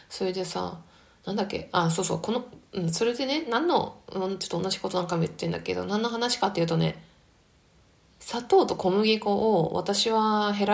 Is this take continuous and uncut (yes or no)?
yes